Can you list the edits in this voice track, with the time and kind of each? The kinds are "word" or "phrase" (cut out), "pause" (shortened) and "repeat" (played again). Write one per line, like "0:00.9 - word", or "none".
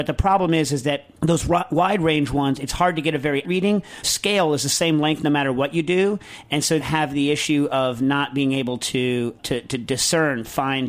0:01.1 - pause
0:03.4 - word
0:04.0 - phrase
0:06.8 - phrase
0:09.4 - word